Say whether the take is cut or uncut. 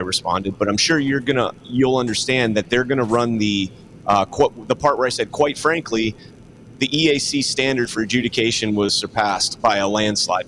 uncut